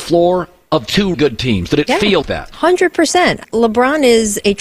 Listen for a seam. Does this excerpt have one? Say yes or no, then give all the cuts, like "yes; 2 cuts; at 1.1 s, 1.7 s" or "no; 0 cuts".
yes; 3 cuts; at 1.1 s, 2.2 s, 3.4 s